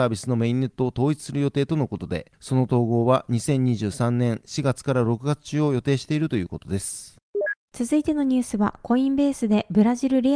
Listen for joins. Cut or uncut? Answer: uncut